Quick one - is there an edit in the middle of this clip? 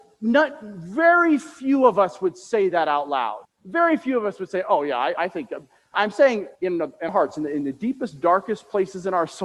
yes; 5 cuts; at 3.4 s, 5.2 s, 5.9 s, 6.5 s, 7.1 s

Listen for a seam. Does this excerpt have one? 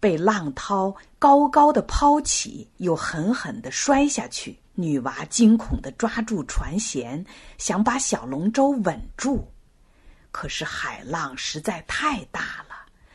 yes; 2 cuts; at 2.8 s, 4.6 s

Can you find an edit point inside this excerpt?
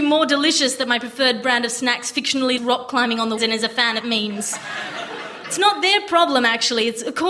yes; 3 cuts; at 2.6 s, 3.4 s, 4.0 s

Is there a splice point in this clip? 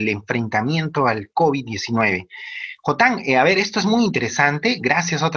no; 0 cuts

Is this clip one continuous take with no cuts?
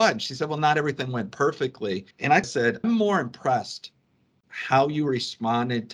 no; 4 cuts; at 2.1 s, 2.4 s, 2.8 s, 4.4 s

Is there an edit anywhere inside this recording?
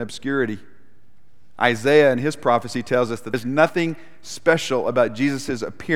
yes; 1 cut; at 3.3 s

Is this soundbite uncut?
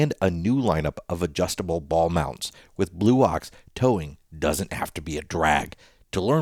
yes; 0 cuts

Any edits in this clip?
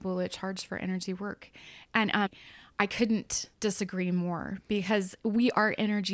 yes; 1 cut; at 3.5 s

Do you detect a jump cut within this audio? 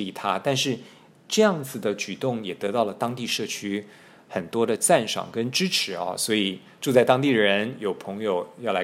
no; 0 cuts

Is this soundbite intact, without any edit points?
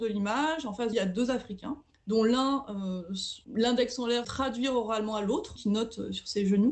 no; 5 cuts; at 0.9 s, 1.9 s, 3.4 s, 4.2 s, 5.6 s

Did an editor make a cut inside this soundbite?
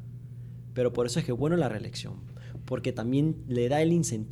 no; 0 cuts

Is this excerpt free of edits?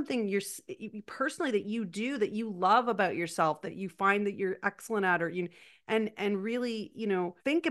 yes; 0 cuts

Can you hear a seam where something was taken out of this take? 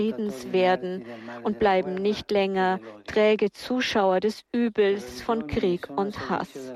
no; 0 cuts

